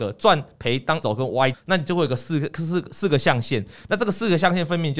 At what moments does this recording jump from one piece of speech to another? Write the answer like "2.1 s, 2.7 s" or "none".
1.0 s, 1.5 s